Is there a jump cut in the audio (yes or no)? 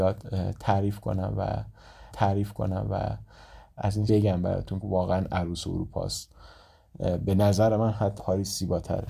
yes